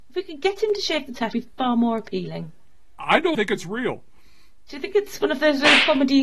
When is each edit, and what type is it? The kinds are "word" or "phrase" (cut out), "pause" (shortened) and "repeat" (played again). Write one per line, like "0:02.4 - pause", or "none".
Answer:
0:01.3 - word
0:03.3 - word